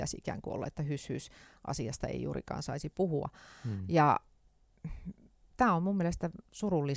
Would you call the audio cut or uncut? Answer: uncut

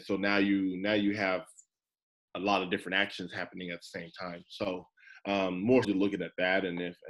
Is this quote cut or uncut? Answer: cut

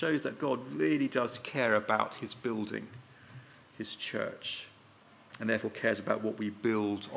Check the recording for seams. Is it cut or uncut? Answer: uncut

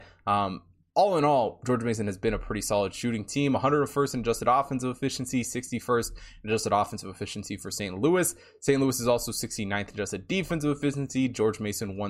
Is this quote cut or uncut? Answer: uncut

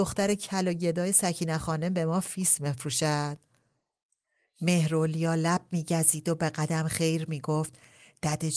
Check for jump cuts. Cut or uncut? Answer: uncut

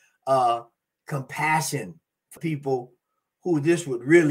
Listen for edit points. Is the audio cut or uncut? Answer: cut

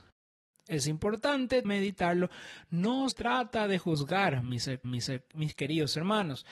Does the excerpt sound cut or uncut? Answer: cut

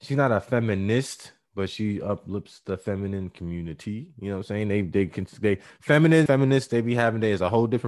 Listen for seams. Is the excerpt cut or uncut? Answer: cut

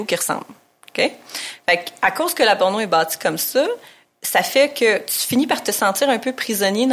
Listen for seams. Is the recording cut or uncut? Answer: uncut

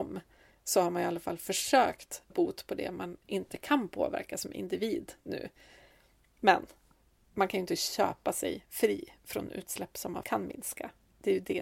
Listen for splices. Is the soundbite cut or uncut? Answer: cut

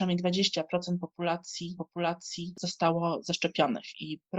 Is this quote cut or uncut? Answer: cut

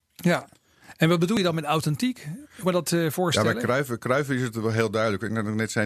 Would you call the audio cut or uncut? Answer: cut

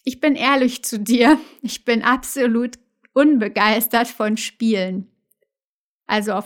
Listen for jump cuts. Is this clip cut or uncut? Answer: uncut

